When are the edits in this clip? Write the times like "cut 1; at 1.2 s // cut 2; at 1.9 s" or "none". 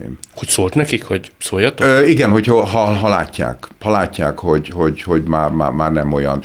none